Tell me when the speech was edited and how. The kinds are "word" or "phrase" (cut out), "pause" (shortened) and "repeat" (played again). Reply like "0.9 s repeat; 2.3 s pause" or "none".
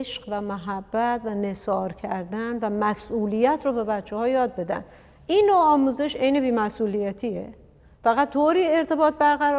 none